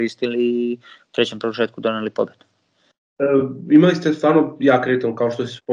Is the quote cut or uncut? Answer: uncut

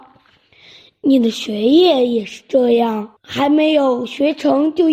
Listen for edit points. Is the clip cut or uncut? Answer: cut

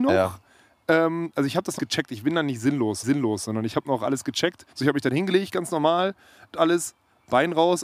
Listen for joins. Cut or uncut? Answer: cut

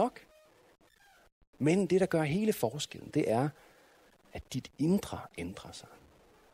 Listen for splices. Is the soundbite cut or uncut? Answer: uncut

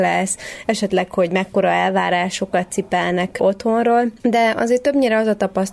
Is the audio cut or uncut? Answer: uncut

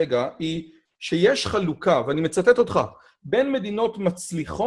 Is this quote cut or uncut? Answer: uncut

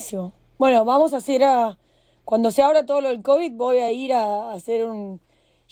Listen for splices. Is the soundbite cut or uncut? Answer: uncut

